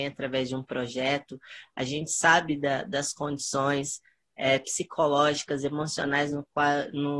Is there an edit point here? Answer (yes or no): no